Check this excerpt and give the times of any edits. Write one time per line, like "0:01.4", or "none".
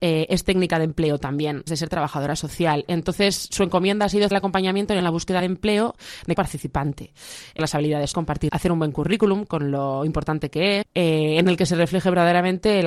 0:01.7
0:04.3
0:05.0
0:05.4
0:06.3
0:07.6
0:08.1
0:08.5
0:10.8